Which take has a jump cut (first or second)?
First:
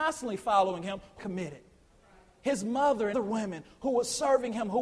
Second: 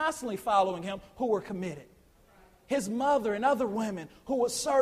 first